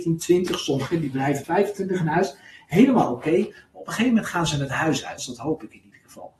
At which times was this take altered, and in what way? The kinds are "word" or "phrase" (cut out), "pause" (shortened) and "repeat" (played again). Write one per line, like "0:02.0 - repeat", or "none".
0:01.4 - word
0:05.2 - word